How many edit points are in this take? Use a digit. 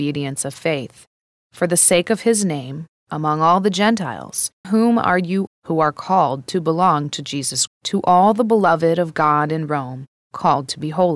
3